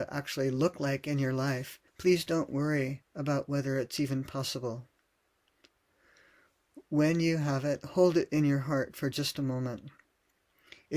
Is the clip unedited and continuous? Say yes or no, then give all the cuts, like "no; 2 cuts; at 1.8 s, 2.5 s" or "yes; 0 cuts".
no; 1 cut; at 1.9 s